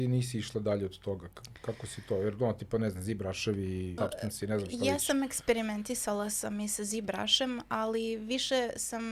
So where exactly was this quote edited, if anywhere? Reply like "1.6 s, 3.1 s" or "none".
4.0 s